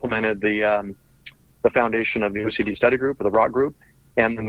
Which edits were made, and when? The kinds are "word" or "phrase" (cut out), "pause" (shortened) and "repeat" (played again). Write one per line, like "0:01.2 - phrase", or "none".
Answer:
none